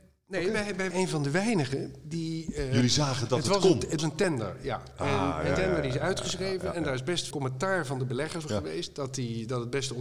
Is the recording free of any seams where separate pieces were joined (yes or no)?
no